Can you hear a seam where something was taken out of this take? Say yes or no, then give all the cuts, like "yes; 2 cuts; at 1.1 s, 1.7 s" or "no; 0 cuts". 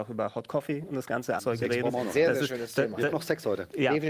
yes; 2 cuts; at 1.4 s, 3.1 s